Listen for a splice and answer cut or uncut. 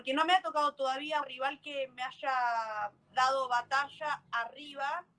cut